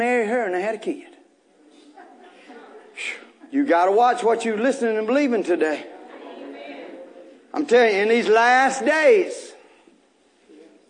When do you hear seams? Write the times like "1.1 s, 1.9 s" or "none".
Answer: none